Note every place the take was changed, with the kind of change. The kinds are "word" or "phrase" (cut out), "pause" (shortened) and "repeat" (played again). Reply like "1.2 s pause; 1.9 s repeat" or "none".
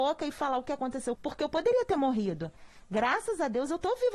1.2 s word

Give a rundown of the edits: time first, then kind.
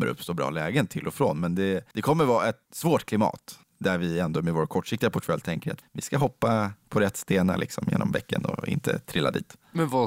1.9 s pause; 2.6 s pause; 3.6 s pause; 5.8 s word

